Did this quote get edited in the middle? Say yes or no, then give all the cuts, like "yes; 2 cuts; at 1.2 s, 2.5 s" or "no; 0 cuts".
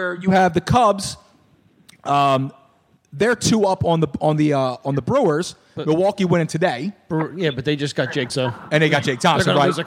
yes; 1 cut; at 8.3 s